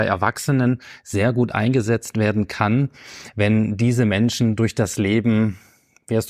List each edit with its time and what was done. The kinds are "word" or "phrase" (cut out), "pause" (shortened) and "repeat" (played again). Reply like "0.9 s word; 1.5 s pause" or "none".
none